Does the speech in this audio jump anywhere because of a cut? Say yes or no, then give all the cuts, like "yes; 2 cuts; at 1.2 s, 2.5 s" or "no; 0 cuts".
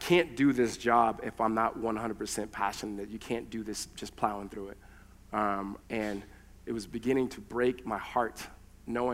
yes; 1 cut; at 5.8 s